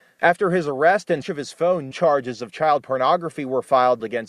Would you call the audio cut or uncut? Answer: cut